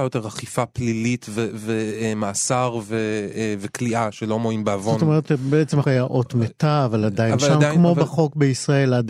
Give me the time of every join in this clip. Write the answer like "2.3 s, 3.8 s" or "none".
5.8 s

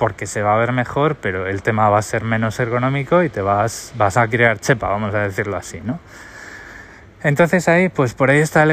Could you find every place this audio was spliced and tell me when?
none

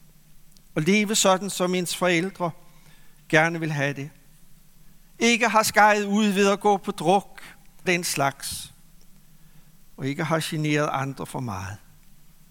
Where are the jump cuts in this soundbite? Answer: 7.9 s

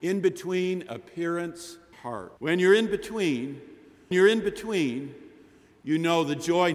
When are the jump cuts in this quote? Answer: 1.9 s, 2.4 s, 4.1 s

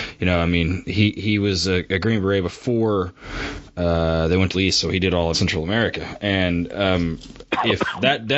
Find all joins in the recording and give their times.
4.5 s, 5.3 s

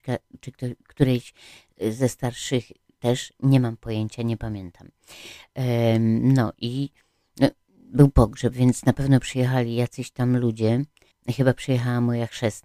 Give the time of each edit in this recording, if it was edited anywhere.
none

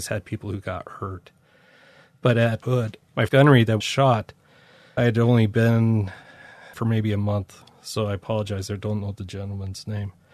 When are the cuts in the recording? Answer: 2.6 s, 3.3 s, 3.8 s, 5.0 s, 6.7 s

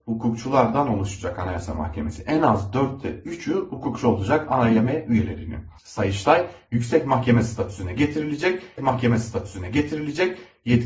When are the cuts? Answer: 5.8 s, 8.8 s

